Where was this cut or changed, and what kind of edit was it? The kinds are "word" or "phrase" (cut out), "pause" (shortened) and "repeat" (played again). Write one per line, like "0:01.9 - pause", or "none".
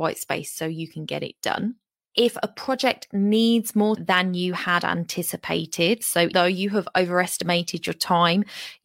0:04.0 - word
0:06.3 - word